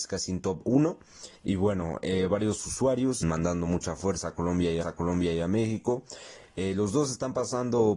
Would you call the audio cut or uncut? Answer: cut